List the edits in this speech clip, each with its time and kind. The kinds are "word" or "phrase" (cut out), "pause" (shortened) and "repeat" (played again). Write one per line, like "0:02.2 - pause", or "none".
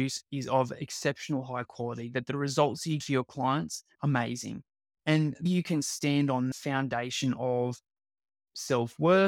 0:03.0 - word
0:03.9 - word
0:05.5 - word
0:06.5 - word